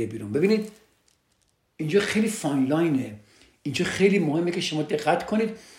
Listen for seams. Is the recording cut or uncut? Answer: uncut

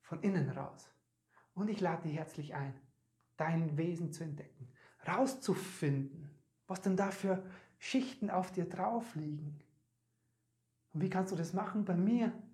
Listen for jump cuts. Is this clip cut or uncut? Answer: uncut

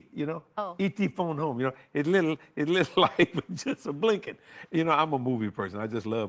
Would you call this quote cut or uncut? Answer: uncut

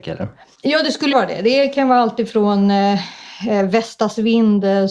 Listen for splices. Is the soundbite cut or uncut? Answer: cut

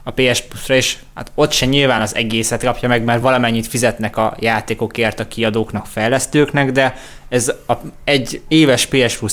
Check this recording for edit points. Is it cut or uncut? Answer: uncut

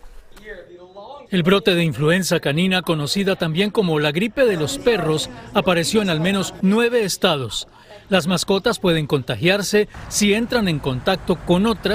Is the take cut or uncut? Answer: cut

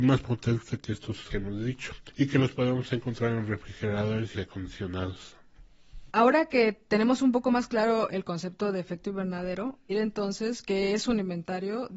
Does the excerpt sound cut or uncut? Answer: cut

